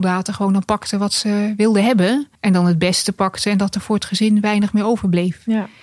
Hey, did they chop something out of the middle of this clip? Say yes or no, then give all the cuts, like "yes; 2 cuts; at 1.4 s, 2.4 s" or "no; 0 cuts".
yes; 1 cut; at 2.3 s